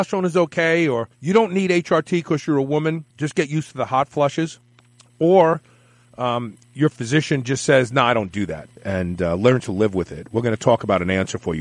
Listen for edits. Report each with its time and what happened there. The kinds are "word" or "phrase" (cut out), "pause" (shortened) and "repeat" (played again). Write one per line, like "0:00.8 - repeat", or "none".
0:01.1 - pause
0:03.1 - pause
0:04.8 - pause
0:06.6 - pause
0:08.8 - pause